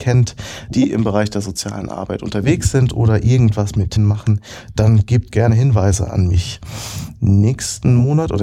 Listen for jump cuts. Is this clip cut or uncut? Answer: cut